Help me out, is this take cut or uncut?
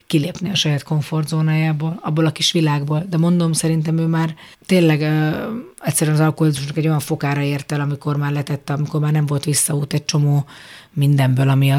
cut